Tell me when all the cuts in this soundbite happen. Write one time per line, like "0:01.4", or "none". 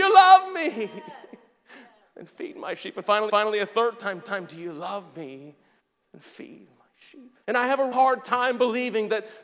0:03.3
0:04.2
0:05.8
0:07.4
0:07.9